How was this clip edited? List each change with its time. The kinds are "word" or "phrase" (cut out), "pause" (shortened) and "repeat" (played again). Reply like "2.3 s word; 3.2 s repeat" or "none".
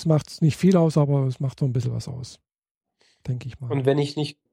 none